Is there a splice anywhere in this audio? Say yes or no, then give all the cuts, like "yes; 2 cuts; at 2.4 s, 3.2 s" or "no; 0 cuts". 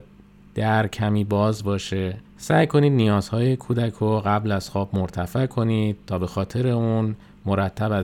yes; 1 cut; at 2.3 s